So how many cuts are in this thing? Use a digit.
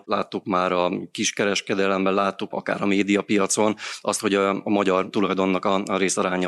1